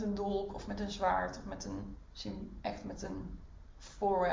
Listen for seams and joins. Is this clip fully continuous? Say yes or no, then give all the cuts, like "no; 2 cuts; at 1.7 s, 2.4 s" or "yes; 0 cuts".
yes; 0 cuts